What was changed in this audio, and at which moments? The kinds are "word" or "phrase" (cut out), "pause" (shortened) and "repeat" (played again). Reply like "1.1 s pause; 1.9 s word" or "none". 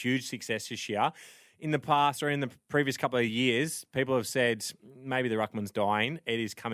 none